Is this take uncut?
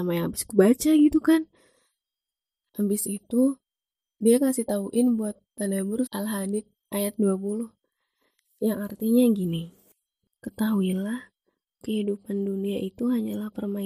no; 2 cuts; at 6.1 s, 11.8 s

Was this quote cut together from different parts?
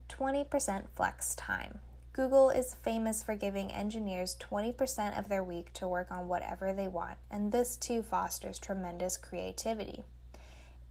no; 0 cuts

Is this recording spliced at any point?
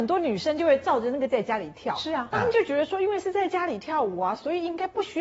yes; 1 cut; at 1.3 s

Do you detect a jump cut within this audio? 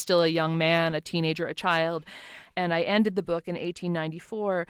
no; 0 cuts

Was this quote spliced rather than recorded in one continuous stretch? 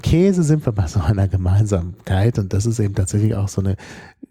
no; 0 cuts

